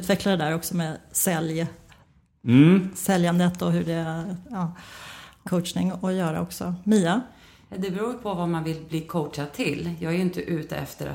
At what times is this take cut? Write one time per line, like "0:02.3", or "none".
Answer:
0:05.5